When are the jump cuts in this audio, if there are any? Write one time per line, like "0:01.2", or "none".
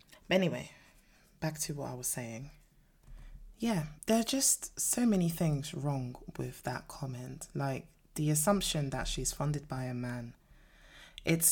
0:04.0